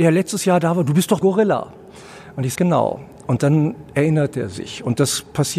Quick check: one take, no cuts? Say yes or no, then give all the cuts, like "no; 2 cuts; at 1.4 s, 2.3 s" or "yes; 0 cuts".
no; 2 cuts; at 1.2 s, 2.5 s